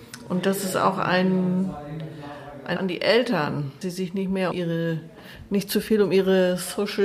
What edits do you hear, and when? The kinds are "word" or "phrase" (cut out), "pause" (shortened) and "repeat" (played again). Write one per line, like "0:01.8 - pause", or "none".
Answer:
0:02.8 - word
0:03.8 - word
0:04.5 - word